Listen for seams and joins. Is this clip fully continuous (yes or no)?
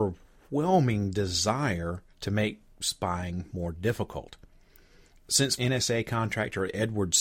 no